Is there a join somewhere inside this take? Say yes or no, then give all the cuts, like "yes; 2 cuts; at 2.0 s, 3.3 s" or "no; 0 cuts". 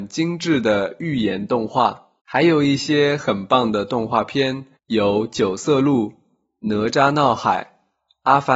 yes; 2 cuts; at 2.2 s, 4.8 s